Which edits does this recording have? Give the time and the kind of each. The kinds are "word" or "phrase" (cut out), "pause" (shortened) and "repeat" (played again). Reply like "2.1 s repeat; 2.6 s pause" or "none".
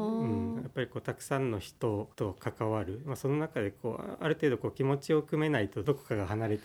2.1 s pause